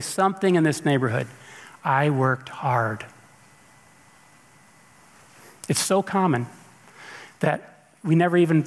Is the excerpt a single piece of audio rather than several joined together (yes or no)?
yes